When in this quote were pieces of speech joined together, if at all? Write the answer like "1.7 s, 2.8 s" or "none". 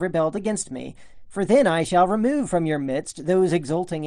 none